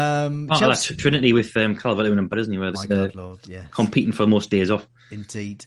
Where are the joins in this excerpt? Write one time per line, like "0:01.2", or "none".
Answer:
0:02.3
0:02.7